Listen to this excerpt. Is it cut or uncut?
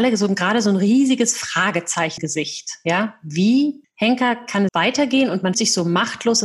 cut